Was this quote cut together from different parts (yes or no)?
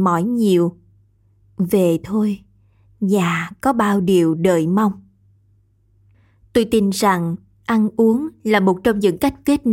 no